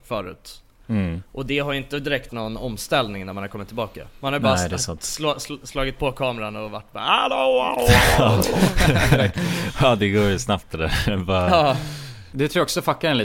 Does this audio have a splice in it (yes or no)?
yes